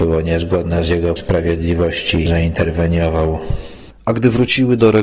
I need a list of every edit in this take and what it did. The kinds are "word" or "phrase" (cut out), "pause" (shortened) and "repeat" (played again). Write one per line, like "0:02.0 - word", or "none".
0:01.2 - word
0:02.3 - word